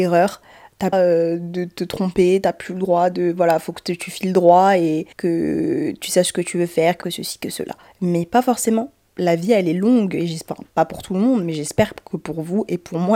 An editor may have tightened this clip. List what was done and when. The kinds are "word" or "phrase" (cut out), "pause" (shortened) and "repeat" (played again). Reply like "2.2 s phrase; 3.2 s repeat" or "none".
0.9 s phrase; 5.1 s pause; 7.9 s pause